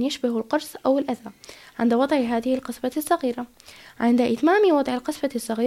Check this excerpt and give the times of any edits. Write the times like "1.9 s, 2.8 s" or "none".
none